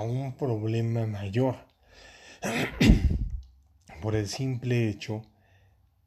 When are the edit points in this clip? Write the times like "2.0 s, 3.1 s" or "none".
none

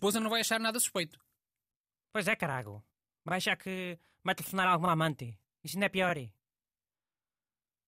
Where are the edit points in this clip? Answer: none

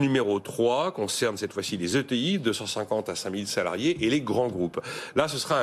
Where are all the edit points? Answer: none

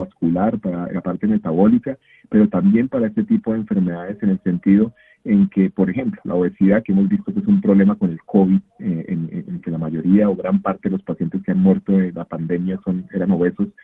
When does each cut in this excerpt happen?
none

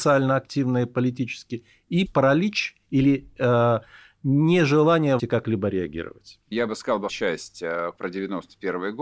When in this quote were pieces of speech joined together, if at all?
2.1 s, 5.2 s, 6.5 s, 7.1 s, 8.0 s

